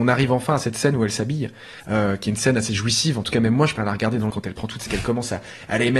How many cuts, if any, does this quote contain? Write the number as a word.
four